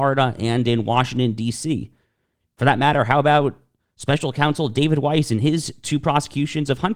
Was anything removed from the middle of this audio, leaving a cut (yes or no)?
no